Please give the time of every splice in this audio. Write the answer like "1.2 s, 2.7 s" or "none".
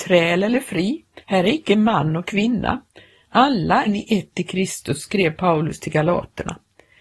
1.2 s, 3.9 s